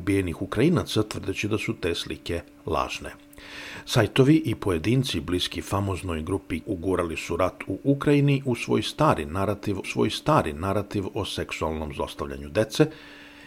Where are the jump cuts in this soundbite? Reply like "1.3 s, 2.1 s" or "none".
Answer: 6.6 s, 9.8 s